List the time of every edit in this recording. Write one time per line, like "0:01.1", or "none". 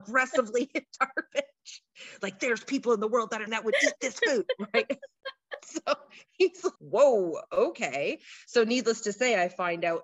0:01.0
0:03.5
0:06.8